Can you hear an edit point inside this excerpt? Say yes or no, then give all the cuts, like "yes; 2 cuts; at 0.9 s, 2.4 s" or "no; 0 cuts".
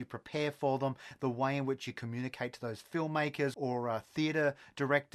yes; 1 cut; at 3.5 s